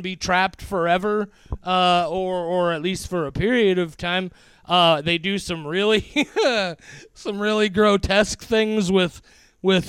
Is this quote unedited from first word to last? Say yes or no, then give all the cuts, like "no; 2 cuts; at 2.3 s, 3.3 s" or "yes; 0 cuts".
yes; 0 cuts